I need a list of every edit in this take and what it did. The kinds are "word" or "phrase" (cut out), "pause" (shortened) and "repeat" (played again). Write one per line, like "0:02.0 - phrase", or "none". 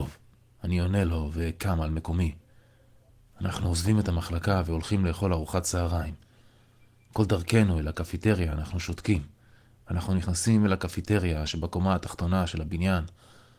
none